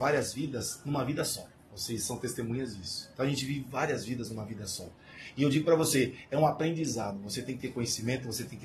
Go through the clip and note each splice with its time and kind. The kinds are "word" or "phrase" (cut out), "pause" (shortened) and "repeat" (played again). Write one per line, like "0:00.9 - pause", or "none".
0:01.5 - pause
0:03.1 - pause

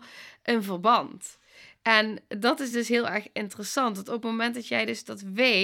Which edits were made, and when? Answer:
none

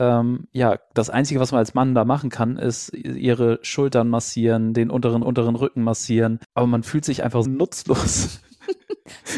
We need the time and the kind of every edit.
0:02.9 - word
0:05.2 - repeat
0:06.4 - pause
0:07.4 - word

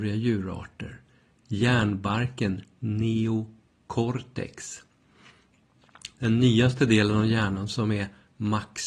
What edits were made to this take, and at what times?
none

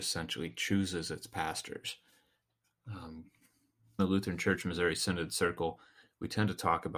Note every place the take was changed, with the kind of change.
0:04.0 - word

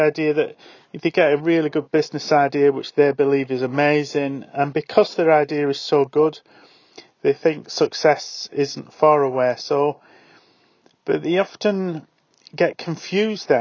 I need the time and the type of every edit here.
none

